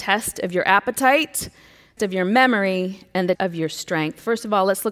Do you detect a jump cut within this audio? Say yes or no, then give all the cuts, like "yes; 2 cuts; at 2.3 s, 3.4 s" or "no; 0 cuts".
yes; 2 cuts; at 2.0 s, 3.3 s